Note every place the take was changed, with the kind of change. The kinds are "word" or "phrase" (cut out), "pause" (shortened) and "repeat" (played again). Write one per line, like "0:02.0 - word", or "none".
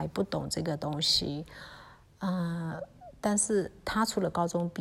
none